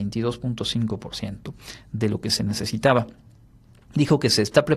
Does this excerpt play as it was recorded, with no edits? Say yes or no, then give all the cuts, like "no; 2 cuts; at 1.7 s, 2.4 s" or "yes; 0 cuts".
yes; 0 cuts